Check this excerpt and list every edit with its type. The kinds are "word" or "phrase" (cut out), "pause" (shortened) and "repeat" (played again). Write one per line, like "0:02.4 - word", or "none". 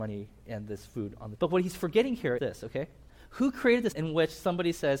0:01.4 - word
0:02.4 - word
0:03.1 - pause
0:03.9 - word

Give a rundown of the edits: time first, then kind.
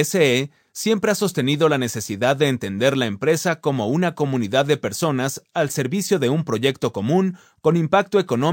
none

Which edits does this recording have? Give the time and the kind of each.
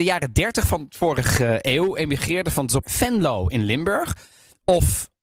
0:02.8 - phrase

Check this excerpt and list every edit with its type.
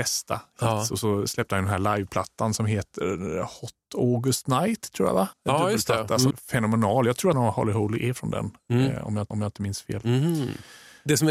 0:05.3 - pause
0:06.3 - word
0:07.3 - phrase
0:09.3 - repeat

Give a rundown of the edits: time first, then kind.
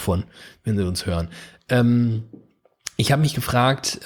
none

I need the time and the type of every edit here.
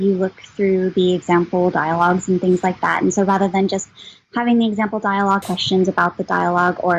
0:05.4 - phrase

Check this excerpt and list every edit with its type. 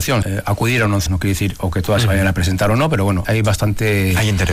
0:01.1 - word
0:03.2 - word

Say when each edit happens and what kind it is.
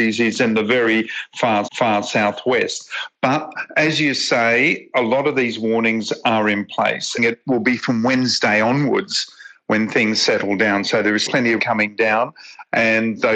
0:01.7 - repeat
0:07.2 - phrase
0:11.3 - word
0:11.6 - word

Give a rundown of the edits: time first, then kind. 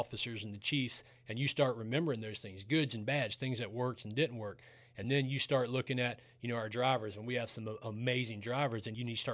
none

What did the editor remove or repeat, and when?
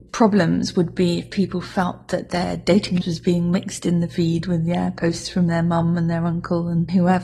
0:03.0 - word

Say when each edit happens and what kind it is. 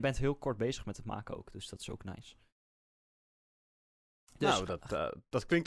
none

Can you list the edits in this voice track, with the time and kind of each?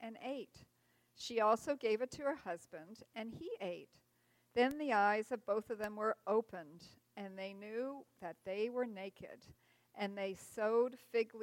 none

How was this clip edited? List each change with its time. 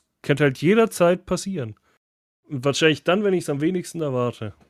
none

